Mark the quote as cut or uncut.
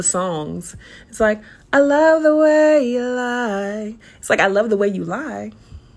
uncut